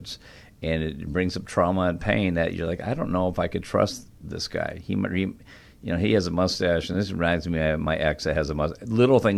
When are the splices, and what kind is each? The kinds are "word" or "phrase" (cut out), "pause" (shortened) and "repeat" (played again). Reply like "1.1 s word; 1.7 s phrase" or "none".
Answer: none